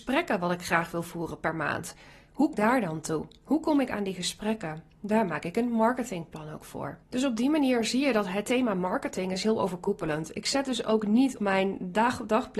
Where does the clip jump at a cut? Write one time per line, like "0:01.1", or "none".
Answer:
0:02.5
0:07.0
0:11.4